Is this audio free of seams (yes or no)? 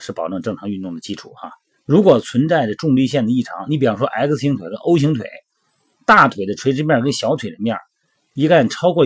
yes